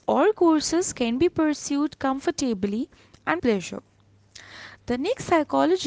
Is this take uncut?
no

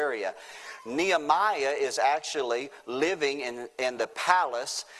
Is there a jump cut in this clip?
no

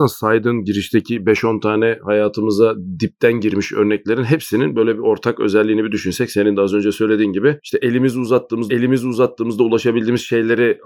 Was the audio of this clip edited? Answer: yes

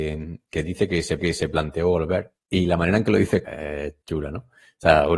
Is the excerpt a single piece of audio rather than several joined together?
no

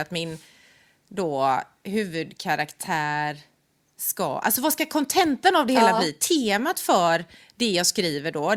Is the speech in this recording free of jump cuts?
yes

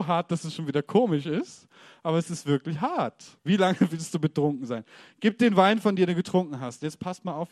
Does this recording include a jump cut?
yes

